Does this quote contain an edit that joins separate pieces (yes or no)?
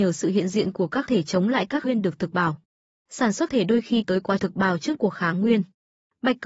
yes